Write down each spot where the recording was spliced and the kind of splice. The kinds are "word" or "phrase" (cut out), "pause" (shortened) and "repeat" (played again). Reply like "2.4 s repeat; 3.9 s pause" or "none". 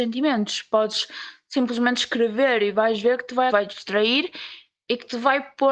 3.5 s phrase